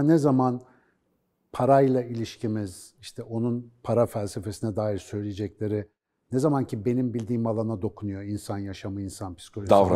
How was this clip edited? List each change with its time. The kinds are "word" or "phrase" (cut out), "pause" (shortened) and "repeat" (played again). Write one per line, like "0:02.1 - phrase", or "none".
none